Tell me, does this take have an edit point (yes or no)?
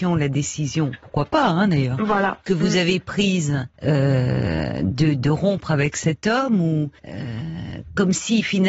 yes